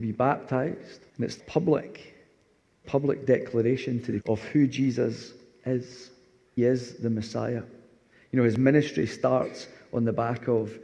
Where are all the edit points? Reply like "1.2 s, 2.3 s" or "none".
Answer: 1.1 s, 1.4 s, 2.8 s, 4.2 s, 6.6 s